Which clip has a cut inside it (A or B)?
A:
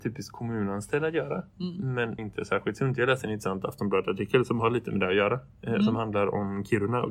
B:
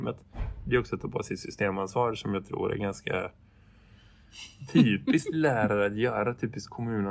A